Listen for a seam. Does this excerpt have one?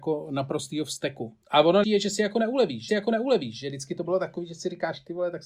yes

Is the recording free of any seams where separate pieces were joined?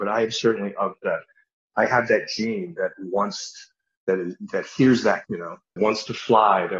no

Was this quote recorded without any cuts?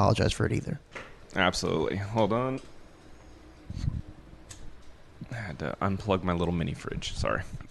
yes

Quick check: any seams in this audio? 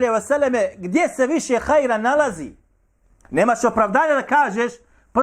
no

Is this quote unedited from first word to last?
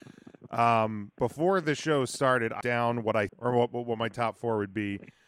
no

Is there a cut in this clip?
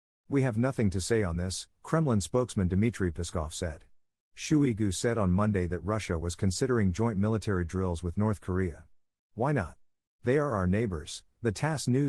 no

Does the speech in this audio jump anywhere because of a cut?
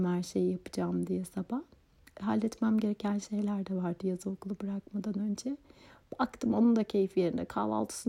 no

